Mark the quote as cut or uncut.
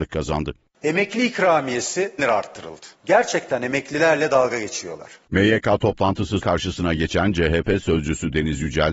cut